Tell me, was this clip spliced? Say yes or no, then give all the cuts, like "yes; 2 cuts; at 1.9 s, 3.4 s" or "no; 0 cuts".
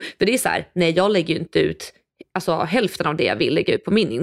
no; 0 cuts